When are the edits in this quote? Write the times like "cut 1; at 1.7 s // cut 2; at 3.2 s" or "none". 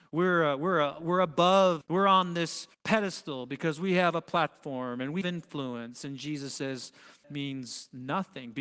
cut 1; at 1.8 s // cut 2; at 2.7 s // cut 3; at 5.2 s // cut 4; at 7.2 s

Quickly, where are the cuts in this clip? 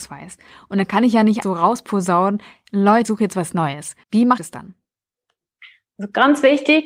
cut 1; at 1.4 s // cut 2; at 3.0 s // cut 3; at 4.0 s // cut 4; at 4.4 s

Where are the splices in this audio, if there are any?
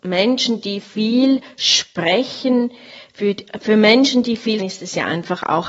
cut 1; at 4.6 s

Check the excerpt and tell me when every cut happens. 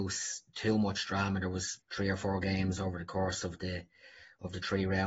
cut 1; at 1.8 s

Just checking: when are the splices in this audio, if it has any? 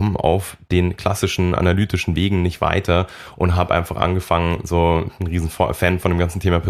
none

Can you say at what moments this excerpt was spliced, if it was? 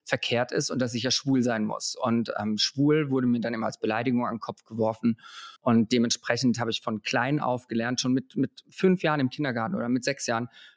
cut 1; at 5.6 s

